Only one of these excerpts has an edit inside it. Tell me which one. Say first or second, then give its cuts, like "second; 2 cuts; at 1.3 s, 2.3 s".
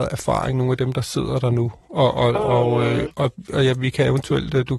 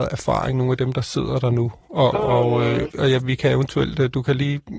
second; 2 cuts; at 2.1 s, 2.9 s